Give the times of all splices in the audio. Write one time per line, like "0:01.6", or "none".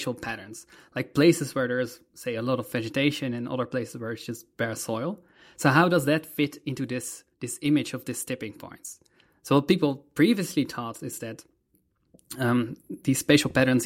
0:07.3